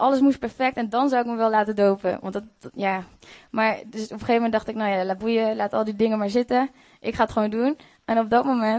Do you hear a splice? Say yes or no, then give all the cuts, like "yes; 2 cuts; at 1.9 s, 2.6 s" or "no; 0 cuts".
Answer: no; 0 cuts